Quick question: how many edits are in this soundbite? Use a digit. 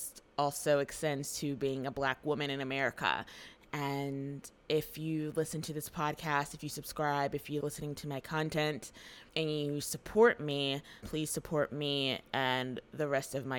3